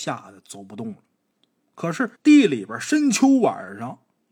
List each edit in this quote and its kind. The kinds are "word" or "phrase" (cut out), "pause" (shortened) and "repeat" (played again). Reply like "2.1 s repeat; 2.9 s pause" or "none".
2.1 s pause